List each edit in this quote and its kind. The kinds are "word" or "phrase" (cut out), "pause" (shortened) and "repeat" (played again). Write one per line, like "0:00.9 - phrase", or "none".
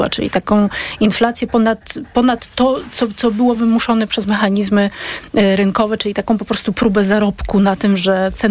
none